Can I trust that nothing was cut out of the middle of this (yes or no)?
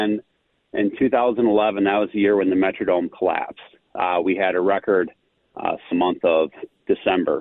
no